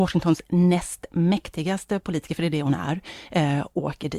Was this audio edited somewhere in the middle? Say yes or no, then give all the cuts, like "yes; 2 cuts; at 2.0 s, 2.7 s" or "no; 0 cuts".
no; 0 cuts